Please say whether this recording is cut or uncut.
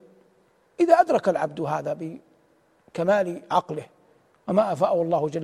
uncut